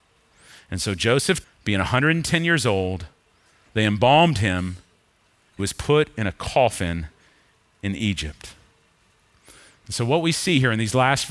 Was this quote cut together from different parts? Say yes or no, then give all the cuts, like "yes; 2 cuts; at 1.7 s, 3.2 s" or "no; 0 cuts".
yes; 2 cuts; at 1.4 s, 5.6 s